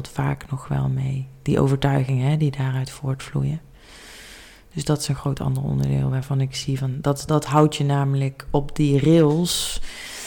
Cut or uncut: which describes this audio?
cut